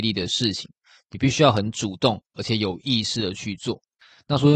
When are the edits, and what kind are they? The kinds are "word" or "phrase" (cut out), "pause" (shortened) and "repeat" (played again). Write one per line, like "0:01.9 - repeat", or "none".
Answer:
none